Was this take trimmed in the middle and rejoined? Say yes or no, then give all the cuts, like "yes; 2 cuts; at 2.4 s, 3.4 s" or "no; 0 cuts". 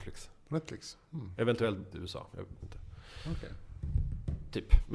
yes; 2 cuts; at 1.9 s, 2.6 s